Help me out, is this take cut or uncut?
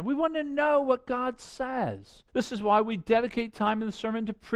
cut